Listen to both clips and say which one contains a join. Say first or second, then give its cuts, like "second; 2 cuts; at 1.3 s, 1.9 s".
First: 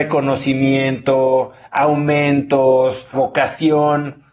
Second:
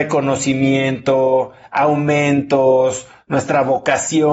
first; 1 cut; at 3.1 s